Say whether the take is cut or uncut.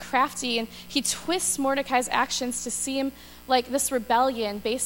uncut